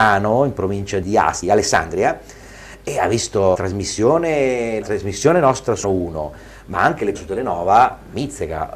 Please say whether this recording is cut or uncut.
cut